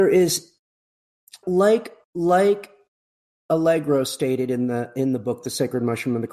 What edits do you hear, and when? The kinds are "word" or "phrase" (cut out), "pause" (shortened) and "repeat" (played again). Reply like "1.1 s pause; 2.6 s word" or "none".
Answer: 1.4 s word; 2.0 s pause